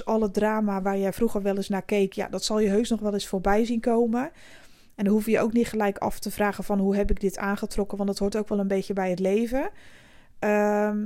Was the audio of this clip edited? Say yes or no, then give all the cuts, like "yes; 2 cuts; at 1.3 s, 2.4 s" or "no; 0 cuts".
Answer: no; 0 cuts